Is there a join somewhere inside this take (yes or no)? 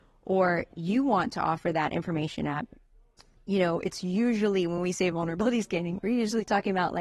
no